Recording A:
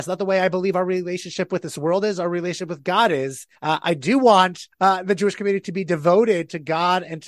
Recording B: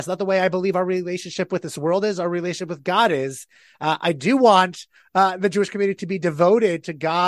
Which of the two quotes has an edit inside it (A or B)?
A